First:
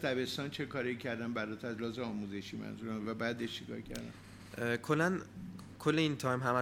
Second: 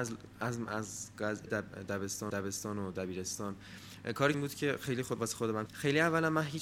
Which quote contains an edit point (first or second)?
second